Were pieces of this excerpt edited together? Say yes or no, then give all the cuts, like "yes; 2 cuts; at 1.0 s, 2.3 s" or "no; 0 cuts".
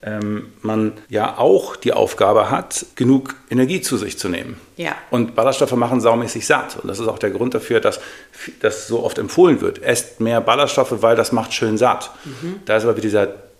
yes; 2 cuts; at 1.0 s, 2.9 s